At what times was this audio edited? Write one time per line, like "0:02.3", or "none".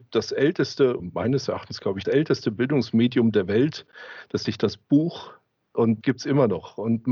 0:01.0
0:02.0
0:04.4
0:06.0